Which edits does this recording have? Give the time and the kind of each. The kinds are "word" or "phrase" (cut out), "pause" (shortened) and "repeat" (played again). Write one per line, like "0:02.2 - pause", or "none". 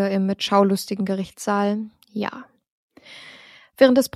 0:01.0 - word